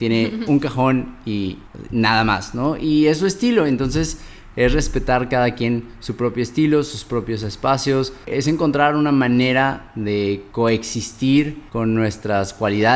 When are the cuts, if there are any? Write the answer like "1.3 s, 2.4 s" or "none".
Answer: none